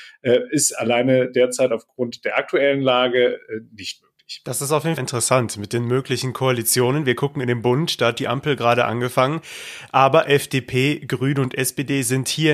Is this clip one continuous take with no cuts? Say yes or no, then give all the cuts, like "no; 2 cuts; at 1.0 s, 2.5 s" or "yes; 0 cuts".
no; 1 cut; at 5.0 s